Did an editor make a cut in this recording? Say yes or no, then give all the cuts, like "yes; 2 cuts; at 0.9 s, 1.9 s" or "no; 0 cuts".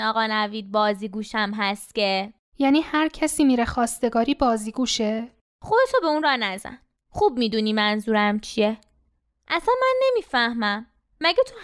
no; 0 cuts